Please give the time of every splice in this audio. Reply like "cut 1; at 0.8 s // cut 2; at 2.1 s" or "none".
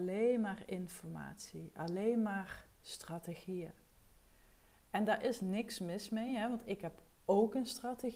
none